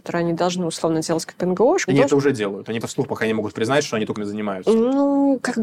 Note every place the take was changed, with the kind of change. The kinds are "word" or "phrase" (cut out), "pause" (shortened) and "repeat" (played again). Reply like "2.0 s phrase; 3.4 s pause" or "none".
1.9 s phrase; 2.8 s word; 4.2 s word